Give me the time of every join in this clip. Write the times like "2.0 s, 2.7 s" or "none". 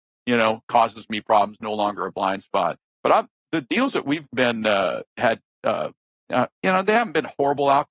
2.9 s, 4.3 s, 5.1 s, 6.0 s